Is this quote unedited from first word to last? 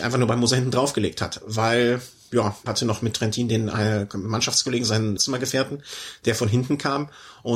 no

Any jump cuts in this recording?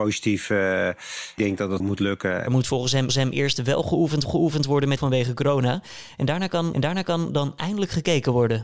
yes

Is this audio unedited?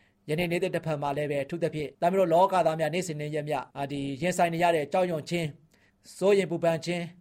no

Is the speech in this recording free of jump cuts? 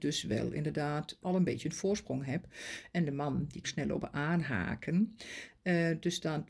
no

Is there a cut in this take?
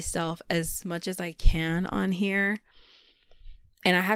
no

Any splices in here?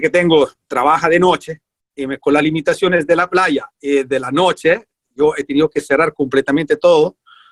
no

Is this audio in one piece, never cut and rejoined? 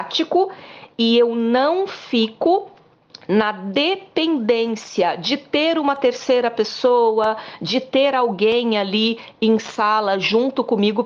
yes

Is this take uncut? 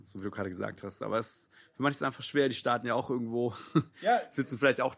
yes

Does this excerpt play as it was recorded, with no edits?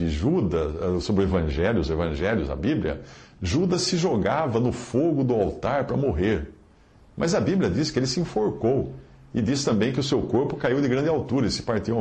yes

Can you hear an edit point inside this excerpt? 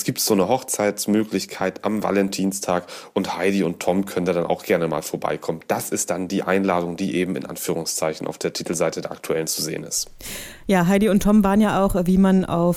no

